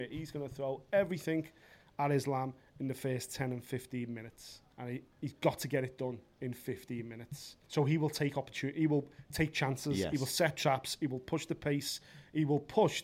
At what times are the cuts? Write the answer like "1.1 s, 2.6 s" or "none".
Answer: 4.7 s, 7.6 s